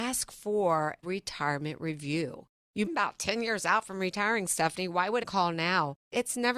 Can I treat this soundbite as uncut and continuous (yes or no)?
no